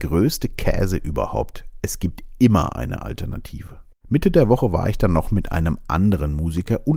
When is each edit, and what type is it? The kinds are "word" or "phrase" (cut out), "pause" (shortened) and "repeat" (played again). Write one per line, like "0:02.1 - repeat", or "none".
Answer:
0:03.9 - pause